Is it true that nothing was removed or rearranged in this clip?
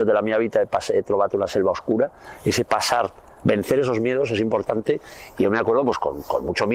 yes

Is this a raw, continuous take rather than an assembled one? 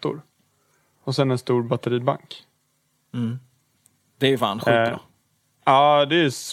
yes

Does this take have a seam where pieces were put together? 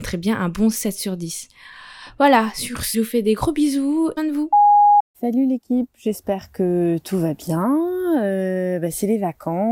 yes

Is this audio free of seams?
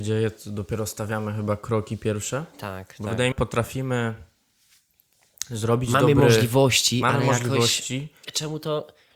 no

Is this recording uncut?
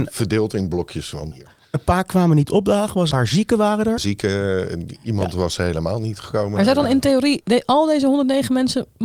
no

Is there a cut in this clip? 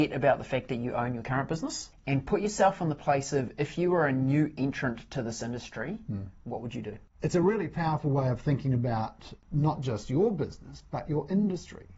no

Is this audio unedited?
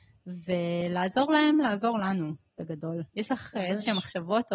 yes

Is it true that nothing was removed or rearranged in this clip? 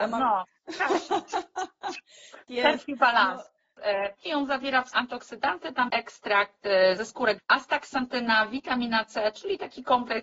no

